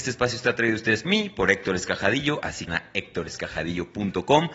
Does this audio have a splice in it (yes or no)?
yes